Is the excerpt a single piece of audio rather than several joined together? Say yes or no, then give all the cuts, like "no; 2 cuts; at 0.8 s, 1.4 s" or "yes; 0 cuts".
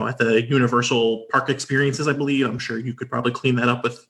yes; 0 cuts